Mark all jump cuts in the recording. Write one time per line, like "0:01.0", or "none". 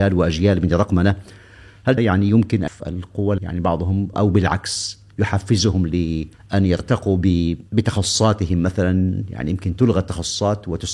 0:02.0
0:02.7
0:03.4
0:04.1
0:06.3
0:07.7